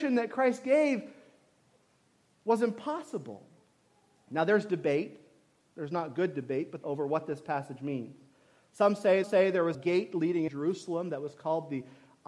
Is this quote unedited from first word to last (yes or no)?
no